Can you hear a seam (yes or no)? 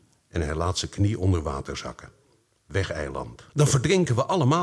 yes